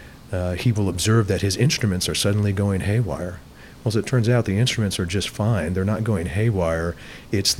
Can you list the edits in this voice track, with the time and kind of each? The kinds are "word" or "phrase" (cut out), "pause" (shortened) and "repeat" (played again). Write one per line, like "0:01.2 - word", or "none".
none